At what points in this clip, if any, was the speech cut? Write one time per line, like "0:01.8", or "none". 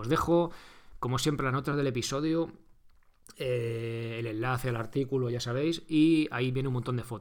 none